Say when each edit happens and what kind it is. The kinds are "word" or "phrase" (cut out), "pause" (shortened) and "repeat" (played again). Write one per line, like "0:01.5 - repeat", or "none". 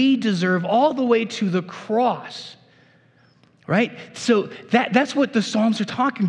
none